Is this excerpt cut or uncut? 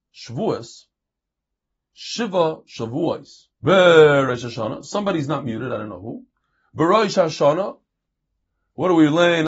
cut